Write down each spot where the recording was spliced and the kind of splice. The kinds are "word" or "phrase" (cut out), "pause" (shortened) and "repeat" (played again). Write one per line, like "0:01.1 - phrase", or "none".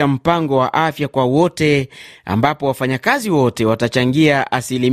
none